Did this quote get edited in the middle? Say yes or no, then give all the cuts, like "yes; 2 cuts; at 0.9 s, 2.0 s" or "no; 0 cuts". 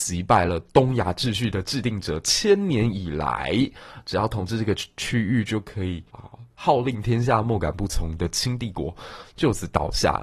yes; 1 cut; at 6.1 s